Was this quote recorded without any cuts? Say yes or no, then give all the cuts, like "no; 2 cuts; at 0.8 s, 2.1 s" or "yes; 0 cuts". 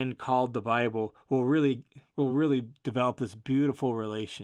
yes; 0 cuts